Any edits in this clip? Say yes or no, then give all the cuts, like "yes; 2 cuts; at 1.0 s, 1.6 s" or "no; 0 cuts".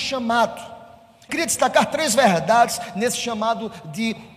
yes; 1 cut; at 1.3 s